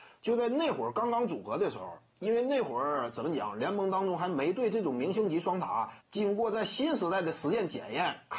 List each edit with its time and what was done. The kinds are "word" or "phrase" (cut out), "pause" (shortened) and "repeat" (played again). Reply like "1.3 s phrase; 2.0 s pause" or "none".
6.0 s pause